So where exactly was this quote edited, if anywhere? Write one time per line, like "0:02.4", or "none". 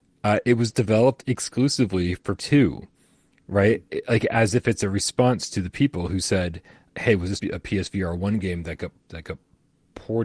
0:02.4
0:03.9
0:06.9
0:07.4